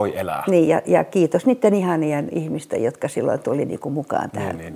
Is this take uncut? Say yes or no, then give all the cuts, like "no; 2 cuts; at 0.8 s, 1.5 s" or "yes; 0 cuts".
yes; 0 cuts